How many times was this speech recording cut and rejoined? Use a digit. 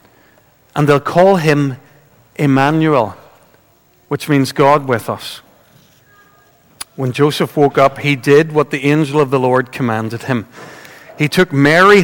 0